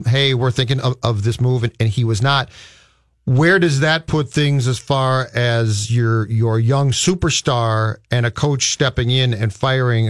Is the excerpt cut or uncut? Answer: uncut